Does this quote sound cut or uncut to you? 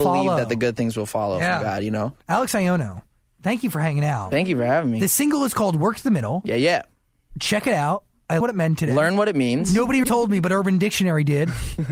cut